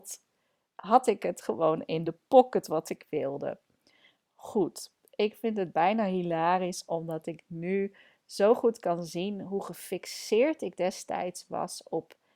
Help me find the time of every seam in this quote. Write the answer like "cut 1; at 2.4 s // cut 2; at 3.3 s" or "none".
none